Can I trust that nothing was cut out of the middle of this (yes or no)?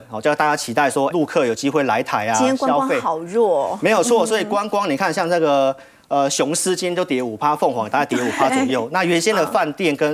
no